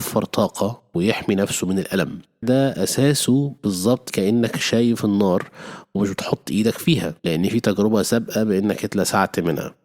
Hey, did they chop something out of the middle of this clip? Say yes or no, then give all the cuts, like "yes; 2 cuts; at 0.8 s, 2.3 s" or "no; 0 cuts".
yes; 3 cuts; at 2.4 s, 4.1 s, 7.2 s